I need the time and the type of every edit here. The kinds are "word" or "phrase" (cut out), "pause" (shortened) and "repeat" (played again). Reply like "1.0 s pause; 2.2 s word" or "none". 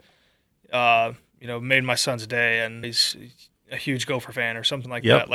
2.8 s word